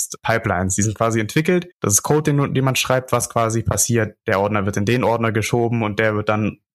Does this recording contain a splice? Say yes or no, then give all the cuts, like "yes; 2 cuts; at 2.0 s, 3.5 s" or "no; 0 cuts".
yes; 1 cut; at 1.7 s